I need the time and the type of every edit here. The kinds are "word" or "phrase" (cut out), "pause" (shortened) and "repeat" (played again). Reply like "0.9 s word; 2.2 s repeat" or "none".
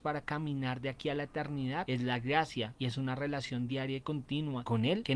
none